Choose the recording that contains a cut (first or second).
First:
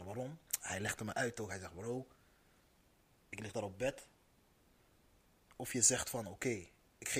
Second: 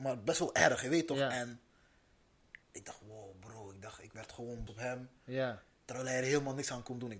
second